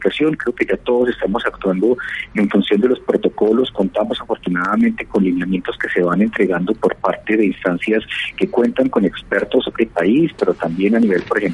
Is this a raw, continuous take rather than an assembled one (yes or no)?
no